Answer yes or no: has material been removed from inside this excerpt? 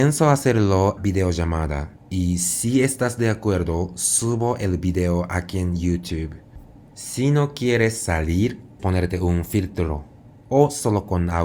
yes